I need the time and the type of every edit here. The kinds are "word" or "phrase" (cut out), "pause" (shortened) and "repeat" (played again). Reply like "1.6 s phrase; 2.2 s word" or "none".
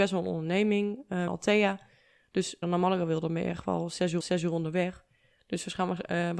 1.3 s phrase; 2.6 s phrase; 4.2 s repeat